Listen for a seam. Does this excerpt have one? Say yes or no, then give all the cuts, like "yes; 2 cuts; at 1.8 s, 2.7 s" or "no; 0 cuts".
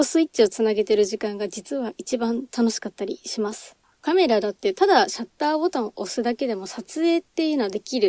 no; 0 cuts